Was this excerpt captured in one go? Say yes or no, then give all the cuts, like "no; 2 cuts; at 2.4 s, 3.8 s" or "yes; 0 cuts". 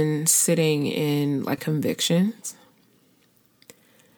no; 1 cut; at 1.6 s